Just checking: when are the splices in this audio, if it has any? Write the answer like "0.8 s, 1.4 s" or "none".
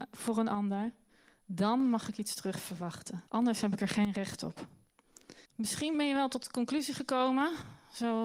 3.3 s, 5.5 s